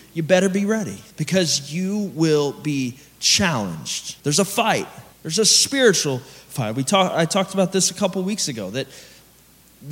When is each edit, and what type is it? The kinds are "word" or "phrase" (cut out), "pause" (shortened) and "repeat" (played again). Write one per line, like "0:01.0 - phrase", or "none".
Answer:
0:01.1 - pause
0:04.2 - pause
0:05.1 - pause